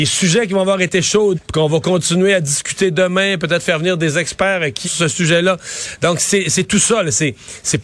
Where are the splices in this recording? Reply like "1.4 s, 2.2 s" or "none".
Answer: 1.3 s, 4.8 s